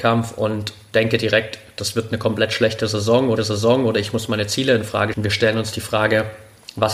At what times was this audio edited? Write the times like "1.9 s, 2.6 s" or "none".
3.4 s, 5.1 s